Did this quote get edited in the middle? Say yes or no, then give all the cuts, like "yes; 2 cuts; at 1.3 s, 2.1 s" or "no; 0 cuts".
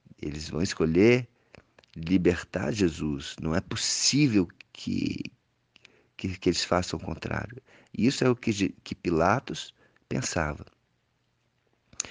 no; 0 cuts